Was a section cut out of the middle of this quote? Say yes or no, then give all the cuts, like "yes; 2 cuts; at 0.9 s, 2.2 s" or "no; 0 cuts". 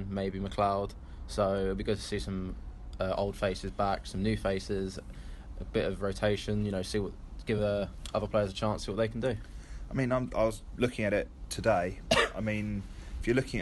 no; 0 cuts